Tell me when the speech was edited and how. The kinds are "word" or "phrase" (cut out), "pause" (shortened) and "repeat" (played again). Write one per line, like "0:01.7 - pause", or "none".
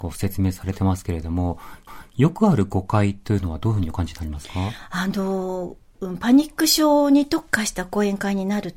0:01.9 - repeat